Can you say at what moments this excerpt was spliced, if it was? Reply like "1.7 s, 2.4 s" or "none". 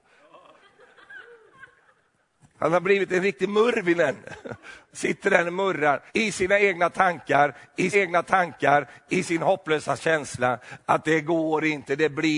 6.1 s, 7.9 s

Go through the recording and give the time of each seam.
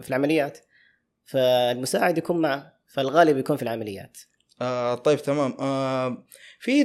none

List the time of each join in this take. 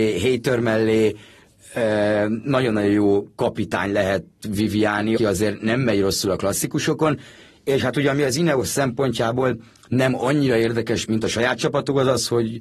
5.2 s, 11.0 s

